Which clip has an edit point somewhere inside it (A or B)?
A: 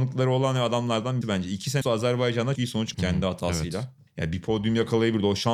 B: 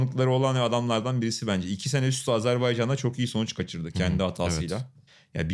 A